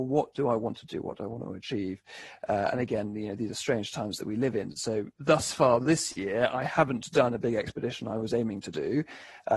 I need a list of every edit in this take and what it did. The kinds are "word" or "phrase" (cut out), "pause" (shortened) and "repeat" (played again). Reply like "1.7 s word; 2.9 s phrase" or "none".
5.2 s word